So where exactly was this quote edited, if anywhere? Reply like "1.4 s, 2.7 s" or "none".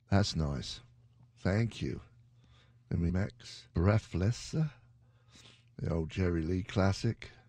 3.1 s, 3.7 s